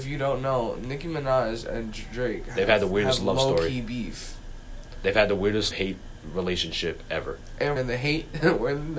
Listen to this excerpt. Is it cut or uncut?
cut